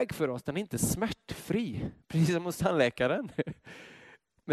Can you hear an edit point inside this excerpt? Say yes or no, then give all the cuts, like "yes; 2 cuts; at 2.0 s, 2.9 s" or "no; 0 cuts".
yes; 1 cut; at 2.0 s